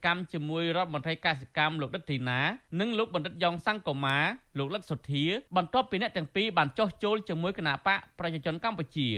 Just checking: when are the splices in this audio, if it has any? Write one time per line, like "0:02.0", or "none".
0:02.7
0:05.5